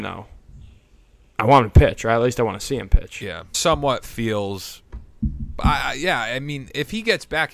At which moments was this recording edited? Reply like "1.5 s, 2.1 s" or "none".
3.5 s